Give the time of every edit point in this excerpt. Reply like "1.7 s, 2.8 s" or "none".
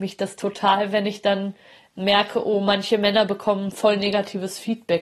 none